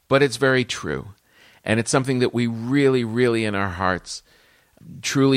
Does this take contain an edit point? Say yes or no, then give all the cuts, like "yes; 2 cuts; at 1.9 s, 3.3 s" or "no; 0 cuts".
no; 0 cuts